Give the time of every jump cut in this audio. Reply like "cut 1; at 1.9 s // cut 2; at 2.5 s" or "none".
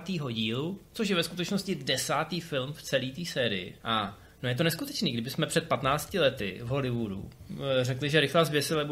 cut 1; at 3.8 s